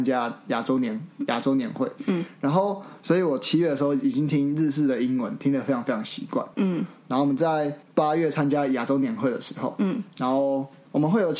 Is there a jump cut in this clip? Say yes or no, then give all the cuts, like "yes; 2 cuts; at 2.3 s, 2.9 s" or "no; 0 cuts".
no; 0 cuts